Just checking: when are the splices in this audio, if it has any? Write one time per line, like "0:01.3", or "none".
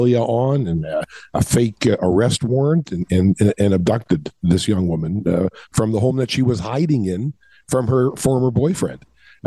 none